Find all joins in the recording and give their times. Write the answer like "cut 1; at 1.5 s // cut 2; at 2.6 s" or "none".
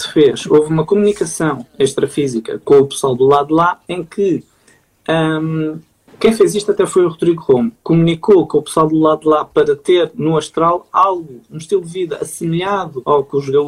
none